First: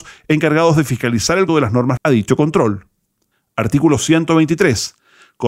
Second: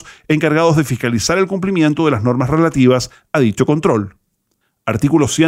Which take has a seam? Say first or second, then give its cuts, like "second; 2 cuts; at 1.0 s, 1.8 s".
first; 2 cuts; at 1.5 s, 2.0 s